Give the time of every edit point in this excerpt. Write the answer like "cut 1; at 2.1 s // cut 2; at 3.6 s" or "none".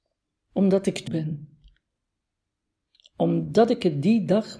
cut 1; at 1.1 s